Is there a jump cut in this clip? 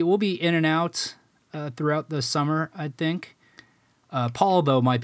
no; 0 cuts

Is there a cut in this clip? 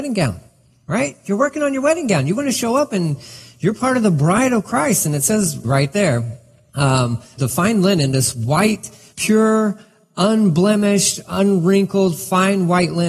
no; 0 cuts

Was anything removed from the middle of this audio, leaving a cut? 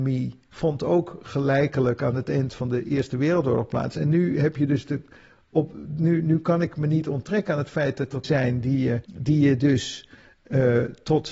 yes; 2 cuts; at 8.2 s, 9.0 s

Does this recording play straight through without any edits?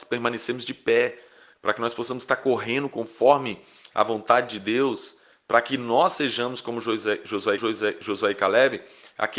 no; 1 cut; at 7.6 s

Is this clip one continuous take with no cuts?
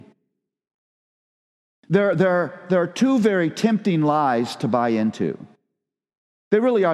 yes; 0 cuts

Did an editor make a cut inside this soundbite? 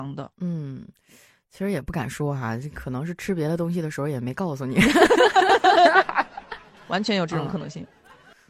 no; 0 cuts

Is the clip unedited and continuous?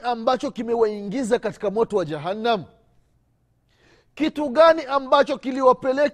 yes; 0 cuts

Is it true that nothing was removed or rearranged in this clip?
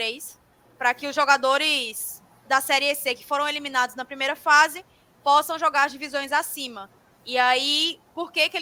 yes; 0 cuts

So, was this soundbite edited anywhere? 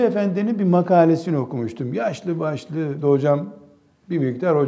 yes; 1 cut; at 3.0 s

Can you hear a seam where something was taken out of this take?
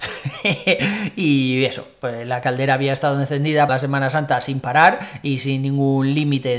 yes; 1 cut; at 3.7 s

